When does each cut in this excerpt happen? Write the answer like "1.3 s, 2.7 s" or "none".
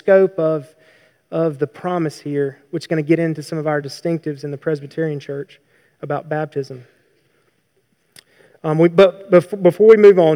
none